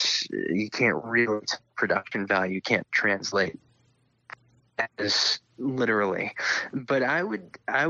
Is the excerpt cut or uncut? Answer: uncut